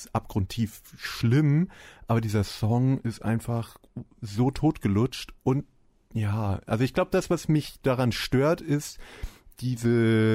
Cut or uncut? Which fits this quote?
uncut